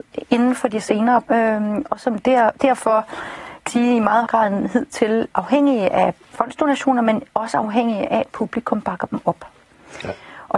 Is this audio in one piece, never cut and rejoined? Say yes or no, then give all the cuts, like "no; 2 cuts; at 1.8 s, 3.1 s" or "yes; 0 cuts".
no; 6 cuts; at 1.3 s, 2.5 s, 3.7 s, 4.3 s, 5.3 s, 6.2 s